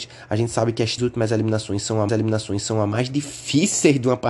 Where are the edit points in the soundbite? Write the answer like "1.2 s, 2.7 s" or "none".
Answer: 1.0 s, 2.1 s